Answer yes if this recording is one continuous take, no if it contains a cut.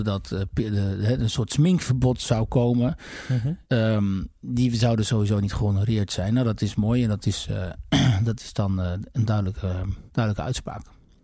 no